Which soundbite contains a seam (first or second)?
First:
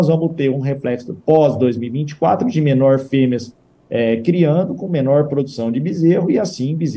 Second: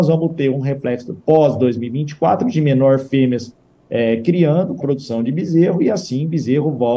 second